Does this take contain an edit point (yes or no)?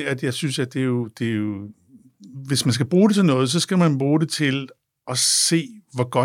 no